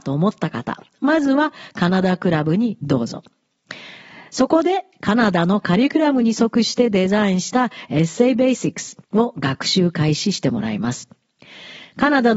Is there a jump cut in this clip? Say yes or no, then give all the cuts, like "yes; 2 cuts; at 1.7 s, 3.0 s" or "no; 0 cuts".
yes; 1 cut; at 9.0 s